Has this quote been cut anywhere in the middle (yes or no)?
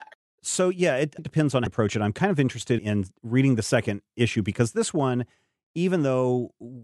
yes